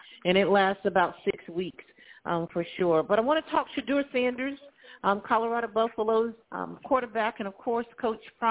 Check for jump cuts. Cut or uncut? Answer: cut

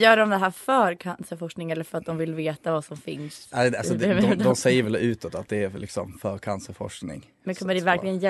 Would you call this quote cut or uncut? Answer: uncut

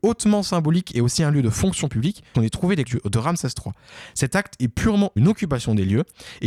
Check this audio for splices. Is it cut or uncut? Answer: cut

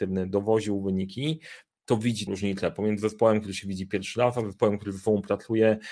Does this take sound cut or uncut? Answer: cut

